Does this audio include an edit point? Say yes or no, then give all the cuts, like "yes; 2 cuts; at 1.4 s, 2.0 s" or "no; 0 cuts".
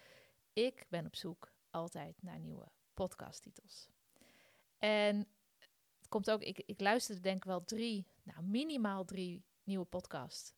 no; 0 cuts